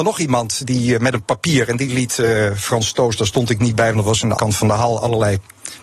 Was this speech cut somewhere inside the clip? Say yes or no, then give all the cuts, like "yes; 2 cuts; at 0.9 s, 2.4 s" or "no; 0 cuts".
yes; 1 cut; at 4.4 s